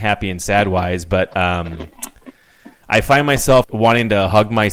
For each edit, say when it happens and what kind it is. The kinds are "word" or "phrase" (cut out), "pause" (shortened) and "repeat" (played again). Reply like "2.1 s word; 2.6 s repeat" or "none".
3.6 s word